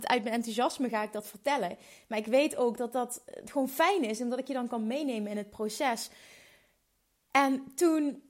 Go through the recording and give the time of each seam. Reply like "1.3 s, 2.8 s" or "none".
none